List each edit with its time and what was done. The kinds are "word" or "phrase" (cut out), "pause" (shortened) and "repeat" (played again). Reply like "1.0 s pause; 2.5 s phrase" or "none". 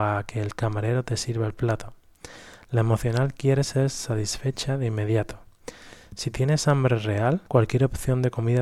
7.5 s pause